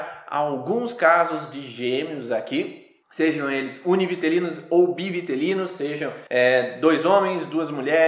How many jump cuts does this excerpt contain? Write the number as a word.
two